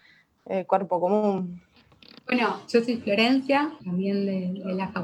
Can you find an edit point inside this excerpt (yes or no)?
yes